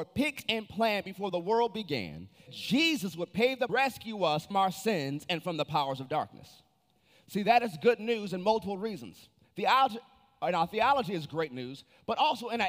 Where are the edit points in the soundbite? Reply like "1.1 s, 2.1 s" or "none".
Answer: 2.5 s, 3.7 s, 4.5 s